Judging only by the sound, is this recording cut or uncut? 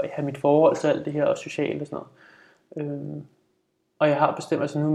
uncut